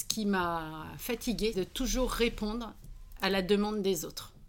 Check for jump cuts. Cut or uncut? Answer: cut